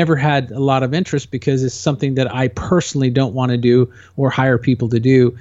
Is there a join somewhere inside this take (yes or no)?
no